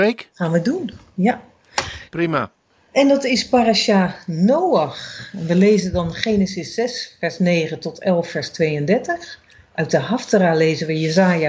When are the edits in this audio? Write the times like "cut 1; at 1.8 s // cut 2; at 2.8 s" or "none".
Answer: none